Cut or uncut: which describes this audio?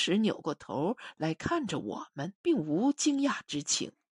cut